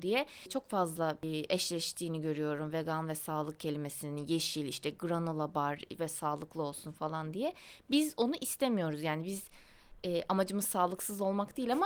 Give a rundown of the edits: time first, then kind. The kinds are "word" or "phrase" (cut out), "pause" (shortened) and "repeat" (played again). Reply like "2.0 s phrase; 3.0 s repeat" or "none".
none